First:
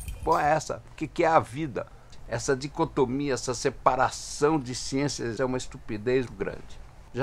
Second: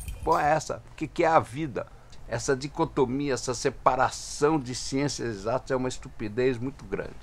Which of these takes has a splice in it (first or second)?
first